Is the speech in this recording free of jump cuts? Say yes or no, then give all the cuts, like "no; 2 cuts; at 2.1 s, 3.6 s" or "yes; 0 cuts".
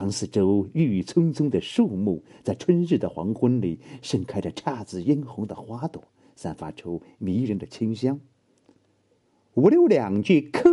yes; 0 cuts